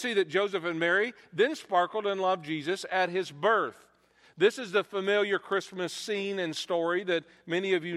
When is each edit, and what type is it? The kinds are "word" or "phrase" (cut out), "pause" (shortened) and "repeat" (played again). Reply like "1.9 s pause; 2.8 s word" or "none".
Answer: none